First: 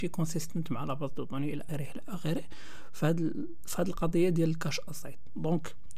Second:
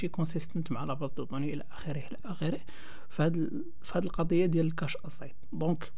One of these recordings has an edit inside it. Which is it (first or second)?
first